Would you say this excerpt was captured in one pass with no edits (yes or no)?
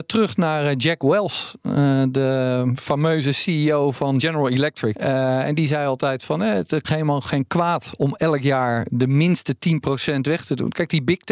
no